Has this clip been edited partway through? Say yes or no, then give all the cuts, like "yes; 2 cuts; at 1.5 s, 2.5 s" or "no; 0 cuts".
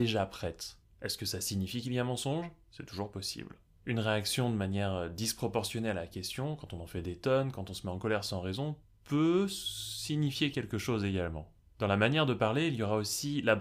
no; 0 cuts